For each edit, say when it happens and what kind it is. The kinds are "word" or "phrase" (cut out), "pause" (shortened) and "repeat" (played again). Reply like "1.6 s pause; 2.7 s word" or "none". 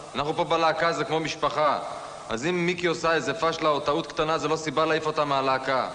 none